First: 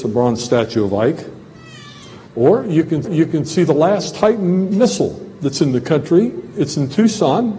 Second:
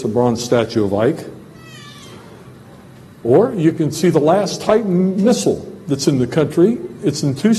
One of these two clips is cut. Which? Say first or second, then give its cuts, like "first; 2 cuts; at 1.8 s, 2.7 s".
first; 2 cuts; at 2.3 s, 3.0 s